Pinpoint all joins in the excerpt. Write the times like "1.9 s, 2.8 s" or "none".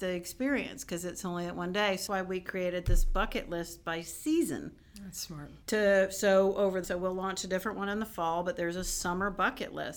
2.1 s, 5.6 s, 6.8 s